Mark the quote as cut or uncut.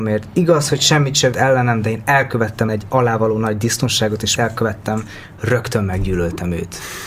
cut